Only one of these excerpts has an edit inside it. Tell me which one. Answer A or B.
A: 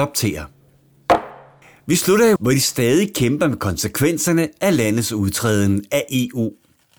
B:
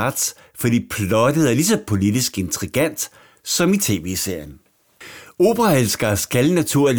A